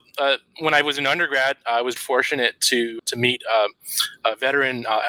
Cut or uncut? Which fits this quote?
cut